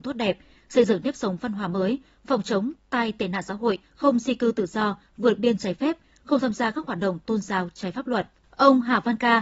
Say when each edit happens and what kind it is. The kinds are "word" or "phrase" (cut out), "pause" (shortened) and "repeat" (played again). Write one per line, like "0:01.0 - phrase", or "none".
0:03.8 - pause

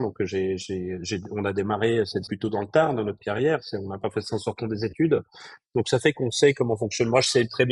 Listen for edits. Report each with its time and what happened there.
0:02.3 - word

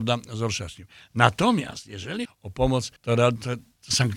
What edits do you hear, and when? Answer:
0:02.2 - word
0:03.0 - pause

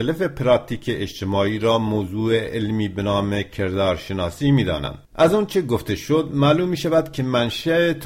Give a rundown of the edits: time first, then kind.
0:05.0 - pause

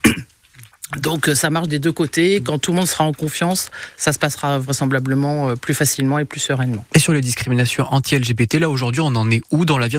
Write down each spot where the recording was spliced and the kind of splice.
none

